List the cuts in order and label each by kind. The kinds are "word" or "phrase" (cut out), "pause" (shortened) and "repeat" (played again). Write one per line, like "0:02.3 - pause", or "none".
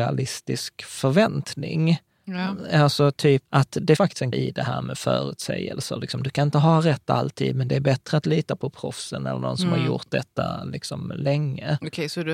0:03.5 - word
0:04.0 - word
0:04.3 - word